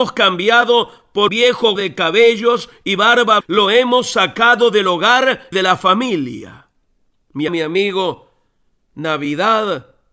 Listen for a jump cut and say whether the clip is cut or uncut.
cut